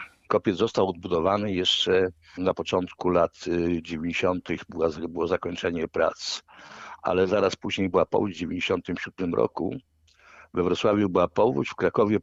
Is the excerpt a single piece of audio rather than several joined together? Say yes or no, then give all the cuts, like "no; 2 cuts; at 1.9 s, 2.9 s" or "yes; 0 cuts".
yes; 0 cuts